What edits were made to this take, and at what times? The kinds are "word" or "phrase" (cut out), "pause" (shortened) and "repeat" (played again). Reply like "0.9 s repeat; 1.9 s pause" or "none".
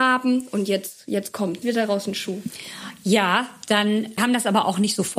1.6 s word; 4.2 s word

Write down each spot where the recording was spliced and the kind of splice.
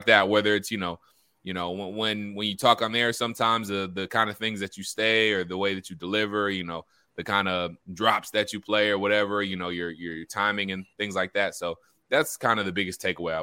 none

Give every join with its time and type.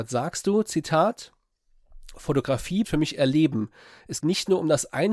2.8 s word; 4.2 s word

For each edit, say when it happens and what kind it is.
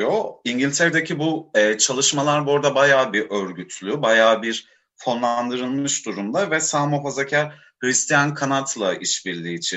none

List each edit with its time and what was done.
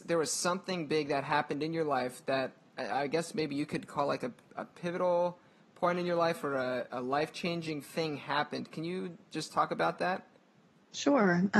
none

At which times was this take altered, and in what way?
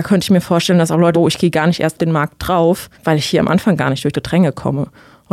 1.1 s word; 2.0 s word; 2.9 s pause; 4.1 s word

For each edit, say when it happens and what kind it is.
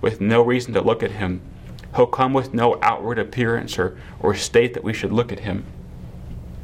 none

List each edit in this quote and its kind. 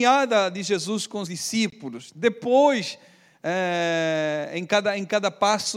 1.3 s word

